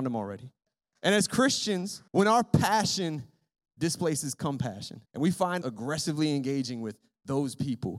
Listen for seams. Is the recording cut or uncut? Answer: cut